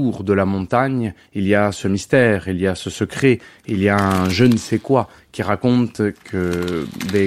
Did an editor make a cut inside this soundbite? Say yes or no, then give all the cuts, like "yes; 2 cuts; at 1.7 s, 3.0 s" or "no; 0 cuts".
no; 0 cuts